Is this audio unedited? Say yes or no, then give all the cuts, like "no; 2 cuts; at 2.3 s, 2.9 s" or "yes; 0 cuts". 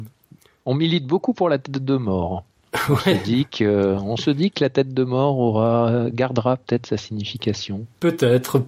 yes; 0 cuts